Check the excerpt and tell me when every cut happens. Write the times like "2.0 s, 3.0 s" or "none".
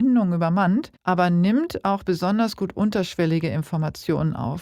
1.0 s